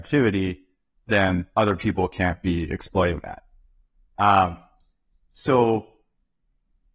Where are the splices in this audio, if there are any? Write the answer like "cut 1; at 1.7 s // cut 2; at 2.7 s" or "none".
none